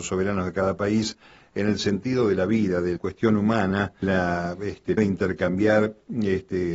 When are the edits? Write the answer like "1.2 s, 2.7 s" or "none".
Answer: 3.0 s, 4.0 s, 5.0 s